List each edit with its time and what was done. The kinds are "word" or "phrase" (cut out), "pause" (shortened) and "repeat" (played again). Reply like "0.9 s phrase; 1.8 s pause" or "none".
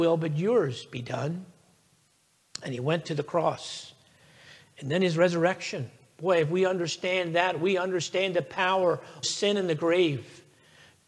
9.2 s word